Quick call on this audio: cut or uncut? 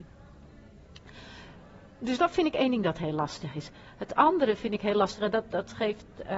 uncut